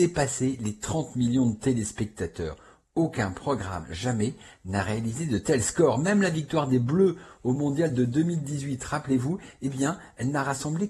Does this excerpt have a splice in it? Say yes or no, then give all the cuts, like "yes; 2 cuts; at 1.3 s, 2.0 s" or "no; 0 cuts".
no; 0 cuts